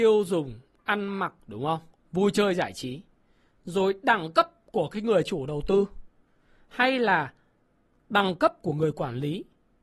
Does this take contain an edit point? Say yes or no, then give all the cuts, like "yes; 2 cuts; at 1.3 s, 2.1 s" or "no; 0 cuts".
yes; 2 cuts; at 1.4 s, 1.9 s